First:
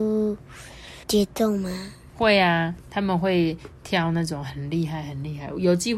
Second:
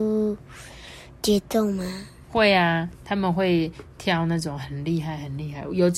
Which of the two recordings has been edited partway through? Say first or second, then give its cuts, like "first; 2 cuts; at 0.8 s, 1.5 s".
first; 1 cut; at 1.0 s